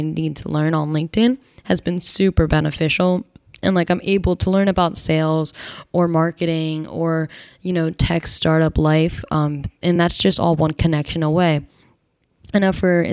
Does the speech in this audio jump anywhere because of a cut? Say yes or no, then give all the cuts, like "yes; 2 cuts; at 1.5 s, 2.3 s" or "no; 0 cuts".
no; 0 cuts